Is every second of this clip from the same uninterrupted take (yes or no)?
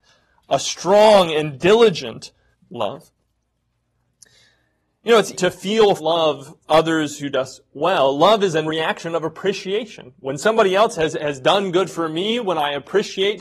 no